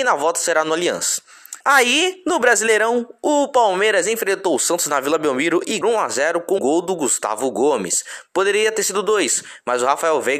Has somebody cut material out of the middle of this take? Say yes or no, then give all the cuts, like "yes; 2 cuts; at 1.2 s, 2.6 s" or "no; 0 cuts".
yes; 3 cuts; at 1.6 s, 5.8 s, 6.6 s